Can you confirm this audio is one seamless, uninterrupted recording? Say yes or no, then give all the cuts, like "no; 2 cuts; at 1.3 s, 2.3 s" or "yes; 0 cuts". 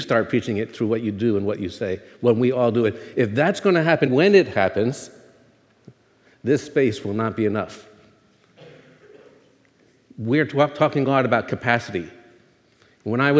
no; 1 cut; at 4.1 s